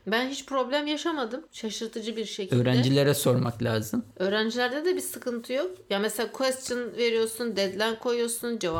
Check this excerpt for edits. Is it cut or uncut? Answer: cut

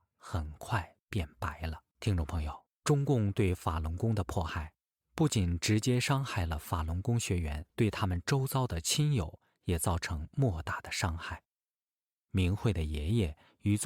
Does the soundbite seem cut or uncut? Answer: cut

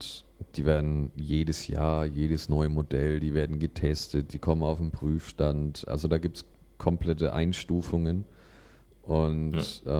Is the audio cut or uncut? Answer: uncut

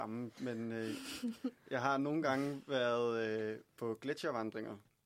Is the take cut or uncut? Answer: uncut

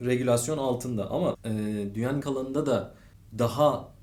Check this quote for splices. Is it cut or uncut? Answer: cut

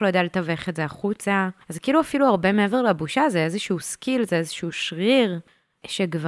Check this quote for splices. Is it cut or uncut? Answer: cut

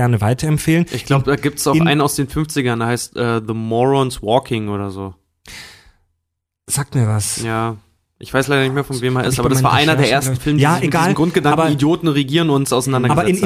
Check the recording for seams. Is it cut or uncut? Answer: uncut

